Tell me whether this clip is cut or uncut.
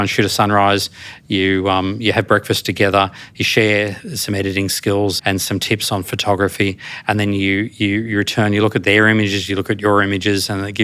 cut